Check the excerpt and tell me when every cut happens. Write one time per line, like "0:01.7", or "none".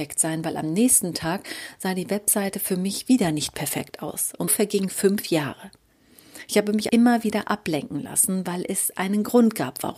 0:04.5
0:06.9